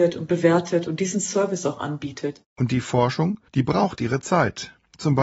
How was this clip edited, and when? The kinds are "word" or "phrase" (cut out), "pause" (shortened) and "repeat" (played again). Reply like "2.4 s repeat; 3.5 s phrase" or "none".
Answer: 2.5 s pause; 3.5 s pause